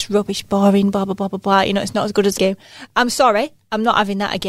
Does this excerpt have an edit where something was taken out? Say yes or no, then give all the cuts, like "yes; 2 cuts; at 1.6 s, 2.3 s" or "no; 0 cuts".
yes; 1 cut; at 2.4 s